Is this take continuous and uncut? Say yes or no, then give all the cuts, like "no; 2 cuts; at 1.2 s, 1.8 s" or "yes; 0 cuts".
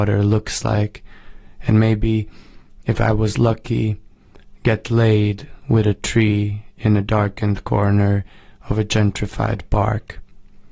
yes; 0 cuts